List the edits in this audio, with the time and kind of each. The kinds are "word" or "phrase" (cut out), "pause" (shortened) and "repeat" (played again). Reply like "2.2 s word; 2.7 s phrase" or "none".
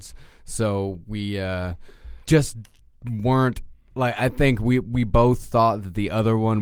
2.2 s pause